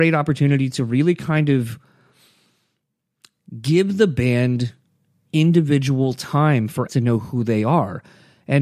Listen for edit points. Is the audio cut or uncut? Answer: cut